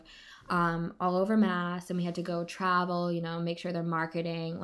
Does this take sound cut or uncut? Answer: uncut